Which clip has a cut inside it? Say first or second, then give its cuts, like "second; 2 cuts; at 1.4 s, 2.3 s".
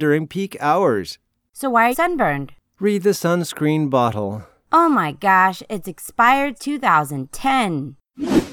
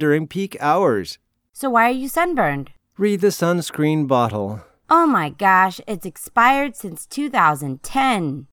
first; 2 cuts; at 1.9 s, 6.6 s